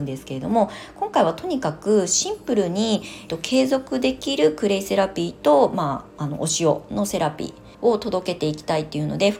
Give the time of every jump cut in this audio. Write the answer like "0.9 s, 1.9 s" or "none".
3.3 s, 7.7 s